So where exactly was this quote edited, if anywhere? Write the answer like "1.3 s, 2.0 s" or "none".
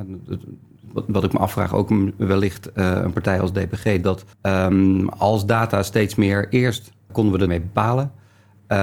4.3 s, 7.1 s, 7.5 s